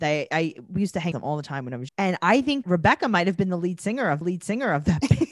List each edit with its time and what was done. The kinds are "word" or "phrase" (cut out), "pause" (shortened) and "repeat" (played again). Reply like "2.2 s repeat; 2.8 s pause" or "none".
1.1 s phrase; 1.9 s word; 2.6 s word; 4.2 s repeat